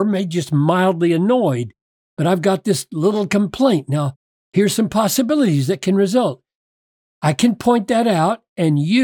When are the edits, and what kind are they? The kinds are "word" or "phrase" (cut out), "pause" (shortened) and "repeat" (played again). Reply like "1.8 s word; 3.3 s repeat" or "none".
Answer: none